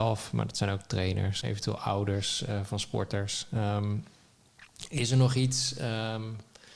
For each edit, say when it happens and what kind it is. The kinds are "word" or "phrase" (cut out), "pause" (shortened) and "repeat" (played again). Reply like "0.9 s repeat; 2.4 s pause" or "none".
1.4 s word